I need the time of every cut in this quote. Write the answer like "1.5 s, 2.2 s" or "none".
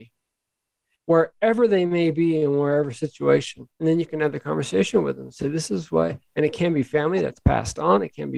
3.7 s